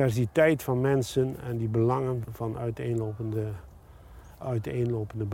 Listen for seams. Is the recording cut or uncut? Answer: cut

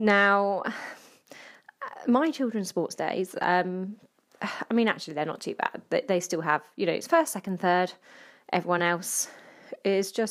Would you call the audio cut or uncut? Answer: uncut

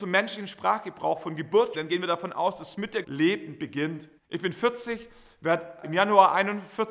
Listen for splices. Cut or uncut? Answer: cut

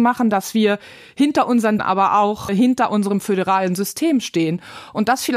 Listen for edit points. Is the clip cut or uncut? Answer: cut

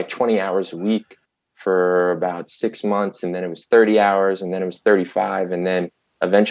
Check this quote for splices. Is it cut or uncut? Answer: cut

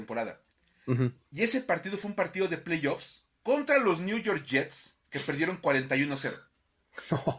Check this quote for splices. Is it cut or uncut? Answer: cut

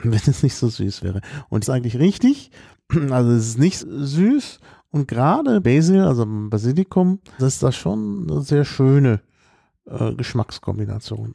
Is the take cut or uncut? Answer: cut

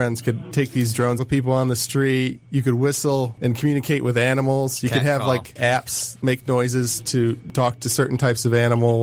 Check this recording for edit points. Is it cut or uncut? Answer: cut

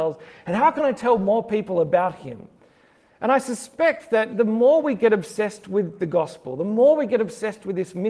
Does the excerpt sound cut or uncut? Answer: uncut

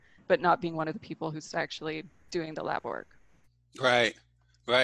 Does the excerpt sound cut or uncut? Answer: cut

